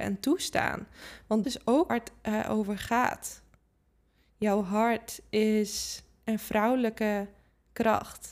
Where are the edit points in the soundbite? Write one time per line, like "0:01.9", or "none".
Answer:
0:01.4
0:01.9

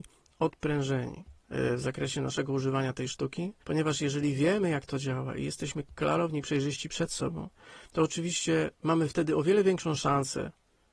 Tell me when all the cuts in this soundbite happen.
0:01.4
0:03.6
0:07.9
0:08.7

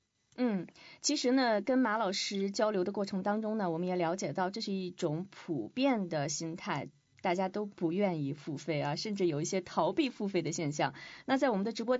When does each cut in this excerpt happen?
none

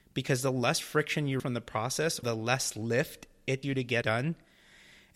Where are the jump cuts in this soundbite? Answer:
0:01.4
0:02.2
0:03.6
0:04.0

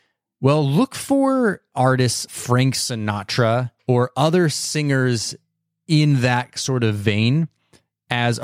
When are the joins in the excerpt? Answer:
0:02.3
0:03.8

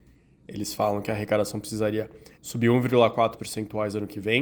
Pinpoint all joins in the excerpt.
0:02.3
0:03.4

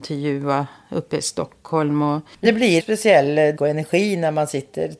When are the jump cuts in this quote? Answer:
0:02.4
0:02.8
0:03.6

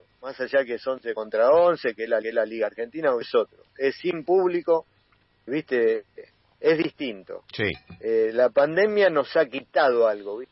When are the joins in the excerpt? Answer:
0:02.2
0:03.2
0:05.5

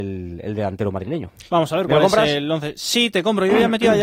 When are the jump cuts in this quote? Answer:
0:01.5

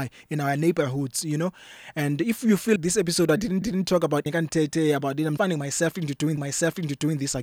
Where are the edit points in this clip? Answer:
0:02.8
0:03.6
0:04.3
0:05.4
0:06.4

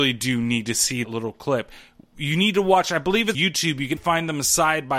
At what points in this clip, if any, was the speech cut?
0:01.0
0:03.3
0:04.0

